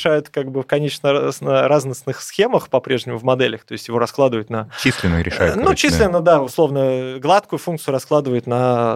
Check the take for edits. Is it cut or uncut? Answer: uncut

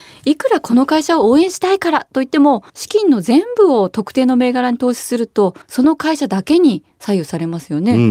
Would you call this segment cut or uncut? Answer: cut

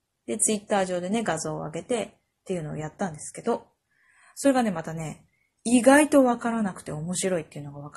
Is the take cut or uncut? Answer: uncut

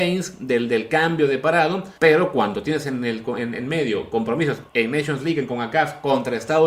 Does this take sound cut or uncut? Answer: cut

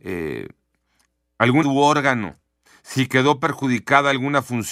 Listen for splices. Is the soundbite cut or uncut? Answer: cut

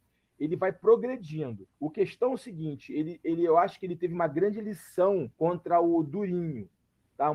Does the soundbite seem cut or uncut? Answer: cut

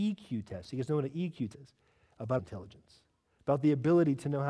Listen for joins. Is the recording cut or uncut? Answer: cut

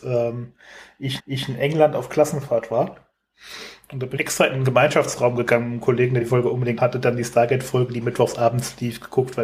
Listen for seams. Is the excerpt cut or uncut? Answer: cut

